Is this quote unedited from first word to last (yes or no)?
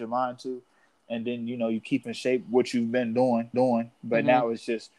no